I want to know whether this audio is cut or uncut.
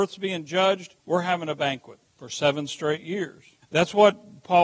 cut